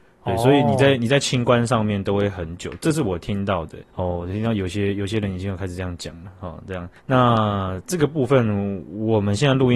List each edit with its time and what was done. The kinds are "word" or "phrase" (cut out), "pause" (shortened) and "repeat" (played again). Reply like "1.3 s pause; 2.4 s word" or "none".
3.9 s pause; 7.0 s pause